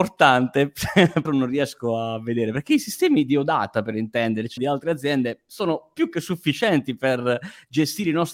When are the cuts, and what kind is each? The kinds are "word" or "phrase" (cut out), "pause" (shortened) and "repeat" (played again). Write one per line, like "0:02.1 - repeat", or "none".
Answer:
0:01.2 - phrase
0:04.6 - word